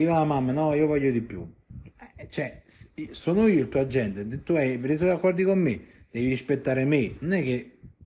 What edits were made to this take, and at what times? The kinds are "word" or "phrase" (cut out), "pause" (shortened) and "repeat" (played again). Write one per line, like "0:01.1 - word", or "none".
none